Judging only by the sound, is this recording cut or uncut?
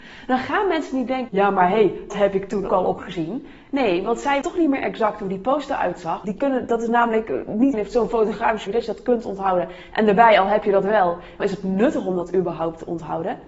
cut